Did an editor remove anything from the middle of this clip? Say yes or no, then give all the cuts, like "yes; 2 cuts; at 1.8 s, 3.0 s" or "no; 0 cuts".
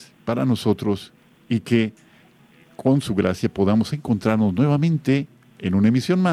no; 0 cuts